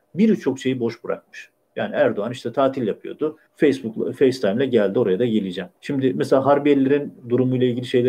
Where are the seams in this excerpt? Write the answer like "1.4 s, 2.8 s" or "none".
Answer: 3.5 s, 5.8 s